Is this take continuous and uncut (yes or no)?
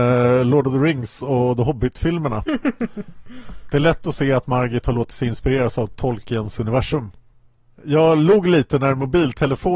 yes